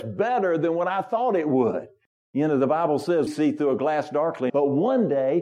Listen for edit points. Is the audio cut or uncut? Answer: cut